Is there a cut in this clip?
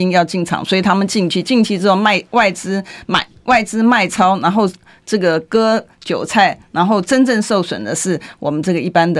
no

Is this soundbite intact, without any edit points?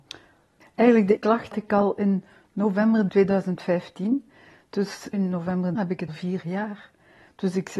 no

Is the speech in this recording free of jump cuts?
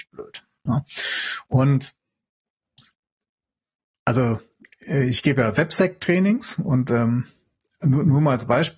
yes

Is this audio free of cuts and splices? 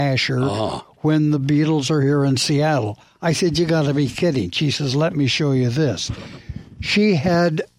yes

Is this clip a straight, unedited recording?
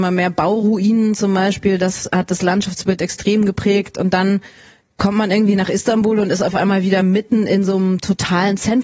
yes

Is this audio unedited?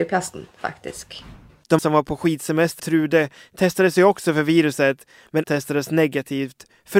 no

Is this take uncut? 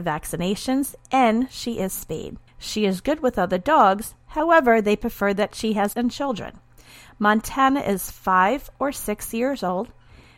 no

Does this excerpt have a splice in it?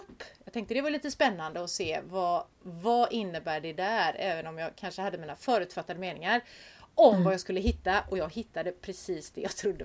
no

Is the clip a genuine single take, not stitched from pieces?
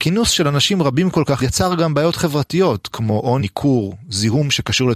no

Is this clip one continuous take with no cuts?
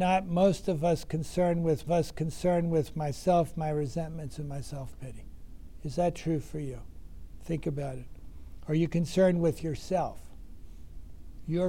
no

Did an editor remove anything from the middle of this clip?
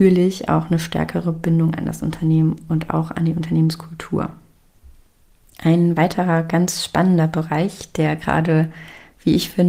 no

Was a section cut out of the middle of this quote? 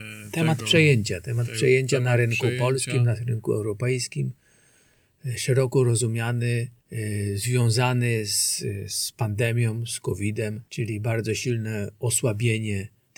yes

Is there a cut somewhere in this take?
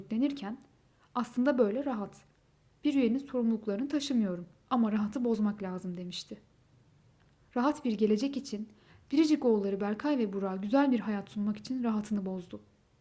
no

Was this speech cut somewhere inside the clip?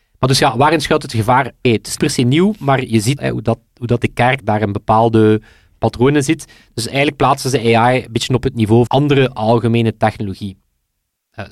yes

